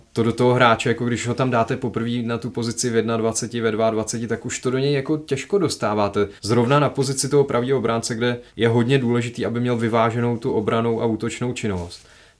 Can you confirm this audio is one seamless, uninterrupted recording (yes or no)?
no